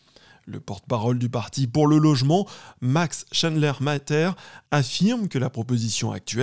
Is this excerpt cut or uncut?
uncut